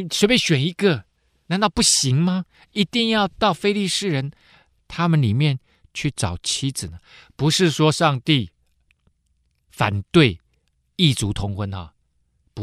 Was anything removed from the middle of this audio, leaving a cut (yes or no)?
no